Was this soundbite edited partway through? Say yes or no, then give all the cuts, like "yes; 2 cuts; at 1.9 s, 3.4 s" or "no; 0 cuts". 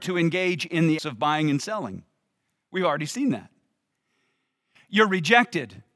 yes; 1 cut; at 1.0 s